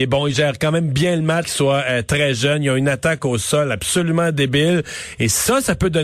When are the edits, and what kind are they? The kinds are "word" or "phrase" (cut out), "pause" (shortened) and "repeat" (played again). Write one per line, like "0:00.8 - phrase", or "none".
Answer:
0:01.4 - word